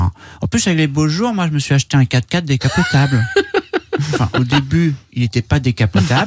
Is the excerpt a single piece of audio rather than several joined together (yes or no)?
yes